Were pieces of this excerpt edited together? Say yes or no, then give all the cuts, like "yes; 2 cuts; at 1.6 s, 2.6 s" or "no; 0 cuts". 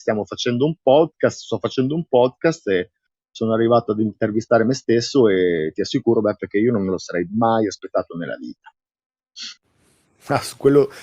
no; 0 cuts